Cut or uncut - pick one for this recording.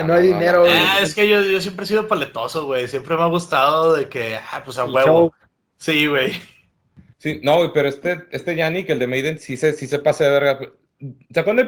uncut